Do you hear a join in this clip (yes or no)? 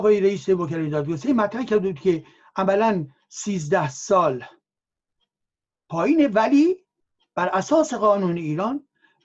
no